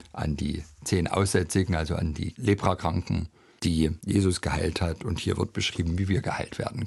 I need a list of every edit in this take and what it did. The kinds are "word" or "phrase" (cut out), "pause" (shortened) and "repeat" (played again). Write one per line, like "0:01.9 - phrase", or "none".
none